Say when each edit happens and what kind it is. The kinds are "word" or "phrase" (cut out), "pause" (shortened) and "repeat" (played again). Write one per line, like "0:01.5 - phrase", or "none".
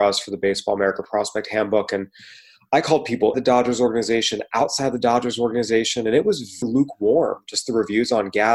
0:03.3 - word
0:06.6 - word

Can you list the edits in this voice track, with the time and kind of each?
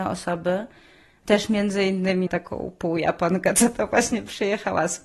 0:02.3 - word

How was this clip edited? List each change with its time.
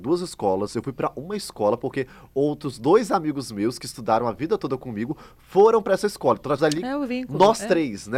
0:06.6 - word

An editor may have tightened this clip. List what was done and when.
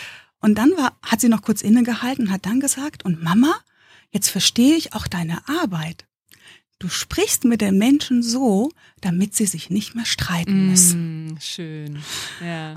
none

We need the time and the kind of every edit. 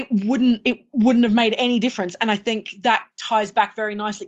none

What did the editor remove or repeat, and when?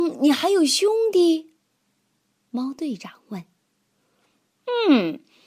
none

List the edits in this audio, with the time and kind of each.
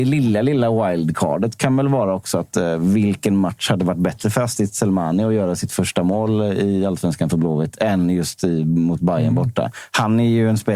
none

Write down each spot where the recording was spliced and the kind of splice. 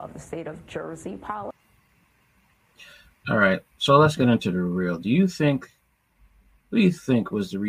none

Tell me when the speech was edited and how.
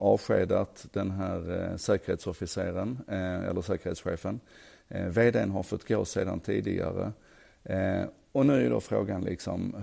none

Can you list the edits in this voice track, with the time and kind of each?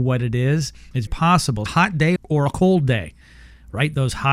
0:01.1 - word
0:01.7 - phrase
0:02.2 - word

